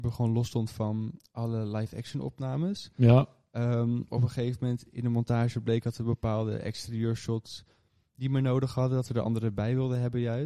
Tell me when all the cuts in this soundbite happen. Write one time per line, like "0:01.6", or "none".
none